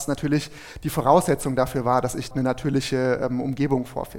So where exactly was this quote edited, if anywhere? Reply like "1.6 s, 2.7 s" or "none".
2.3 s